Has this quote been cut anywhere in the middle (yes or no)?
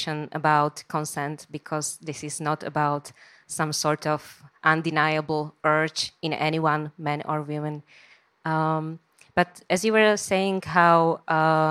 yes